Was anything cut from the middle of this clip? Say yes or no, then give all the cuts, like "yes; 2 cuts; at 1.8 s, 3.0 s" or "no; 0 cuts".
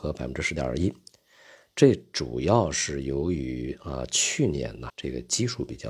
yes; 1 cut; at 4.9 s